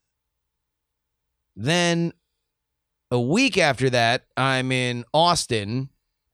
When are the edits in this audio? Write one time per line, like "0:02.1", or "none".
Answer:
none